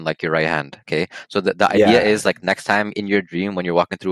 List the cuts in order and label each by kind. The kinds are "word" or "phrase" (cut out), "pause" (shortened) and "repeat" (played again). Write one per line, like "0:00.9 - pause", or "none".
none